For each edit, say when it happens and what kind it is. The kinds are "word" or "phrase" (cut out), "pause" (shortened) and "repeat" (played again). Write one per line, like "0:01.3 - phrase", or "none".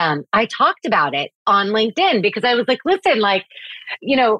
0:01.3 - pause